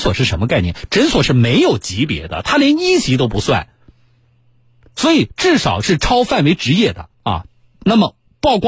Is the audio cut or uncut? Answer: cut